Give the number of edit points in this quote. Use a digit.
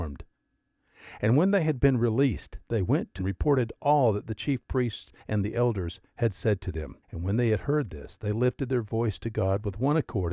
3